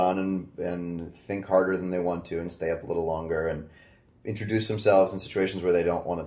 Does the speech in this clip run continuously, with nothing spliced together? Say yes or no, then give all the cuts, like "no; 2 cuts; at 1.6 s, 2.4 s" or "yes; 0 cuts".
yes; 0 cuts